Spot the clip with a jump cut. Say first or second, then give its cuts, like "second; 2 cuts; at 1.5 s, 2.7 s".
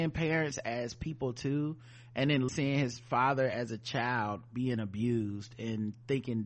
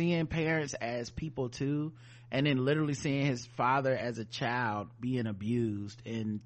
first; 1 cut; at 2.5 s